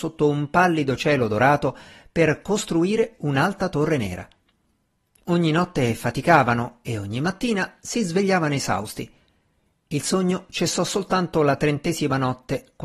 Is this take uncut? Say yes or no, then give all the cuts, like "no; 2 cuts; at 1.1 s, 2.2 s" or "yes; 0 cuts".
yes; 0 cuts